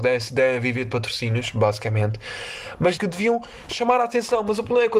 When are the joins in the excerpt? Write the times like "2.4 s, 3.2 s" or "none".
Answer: 3.0 s